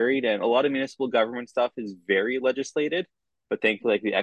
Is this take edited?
no; 0 cuts

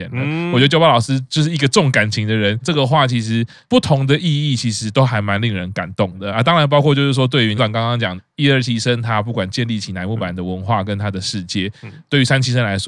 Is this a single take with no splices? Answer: no; 1 cut; at 7.6 s

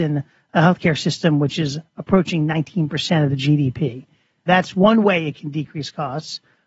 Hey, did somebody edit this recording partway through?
no; 0 cuts

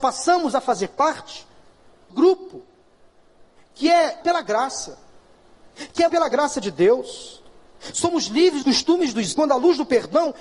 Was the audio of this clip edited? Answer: yes; 5 cuts; at 2.1 s, 4.2 s, 6.1 s, 8.6 s, 9.3 s

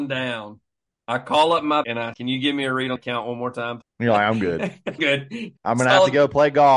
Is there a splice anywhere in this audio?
yes; 6 cuts; at 1.8 s, 2.1 s, 3.0 s, 3.8 s, 5.0 s, 5.6 s

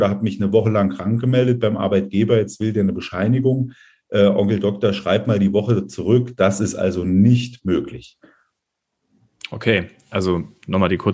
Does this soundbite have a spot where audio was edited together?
no; 0 cuts

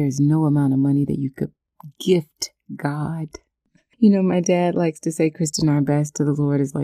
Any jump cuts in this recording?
no; 0 cuts

